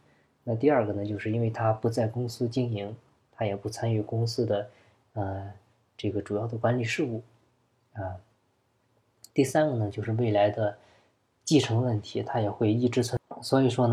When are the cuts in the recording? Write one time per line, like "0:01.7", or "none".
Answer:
none